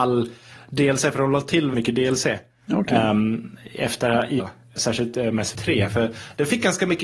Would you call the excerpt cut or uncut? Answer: cut